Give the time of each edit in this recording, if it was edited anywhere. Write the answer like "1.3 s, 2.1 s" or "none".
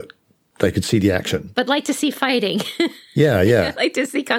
none